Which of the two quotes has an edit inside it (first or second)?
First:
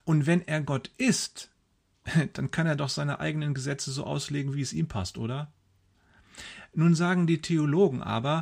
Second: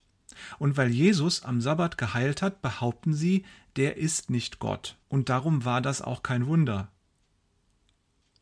second